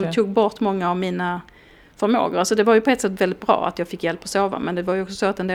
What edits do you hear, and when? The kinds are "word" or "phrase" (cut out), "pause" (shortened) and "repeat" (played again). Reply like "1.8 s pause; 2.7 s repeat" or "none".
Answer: none